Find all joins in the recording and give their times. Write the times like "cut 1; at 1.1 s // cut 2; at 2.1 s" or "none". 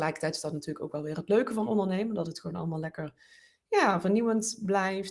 none